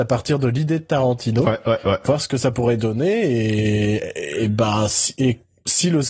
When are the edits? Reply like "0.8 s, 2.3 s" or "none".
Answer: none

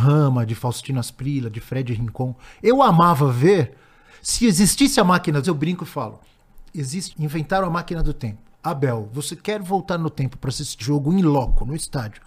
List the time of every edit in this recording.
5.4 s, 7.1 s, 8.5 s, 10.8 s

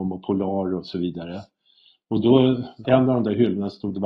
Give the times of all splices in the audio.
2.8 s

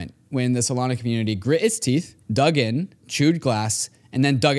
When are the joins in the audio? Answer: 2.2 s

